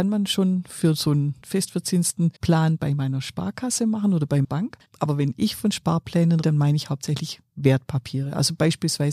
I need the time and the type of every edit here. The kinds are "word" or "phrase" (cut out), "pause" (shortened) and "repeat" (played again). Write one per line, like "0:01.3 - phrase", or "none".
0:01.4 - word
0:02.4 - pause
0:04.4 - word
0:04.8 - pause
0:06.4 - word